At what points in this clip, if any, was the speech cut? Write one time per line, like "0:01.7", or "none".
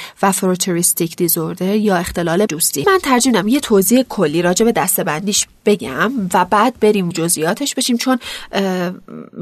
0:02.5
0:02.8
0:07.1